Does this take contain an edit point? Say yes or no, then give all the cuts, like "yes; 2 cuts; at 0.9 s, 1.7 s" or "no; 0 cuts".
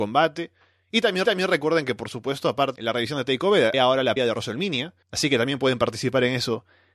yes; 5 cuts; at 1.2 s, 2.8 s, 3.7 s, 4.2 s, 5.0 s